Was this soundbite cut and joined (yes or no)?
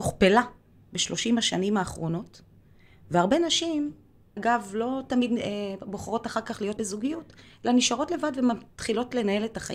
yes